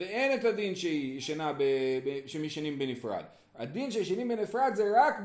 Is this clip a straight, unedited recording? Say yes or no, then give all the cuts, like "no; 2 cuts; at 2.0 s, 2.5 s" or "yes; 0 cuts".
yes; 0 cuts